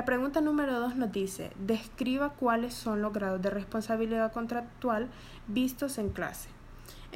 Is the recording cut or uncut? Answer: uncut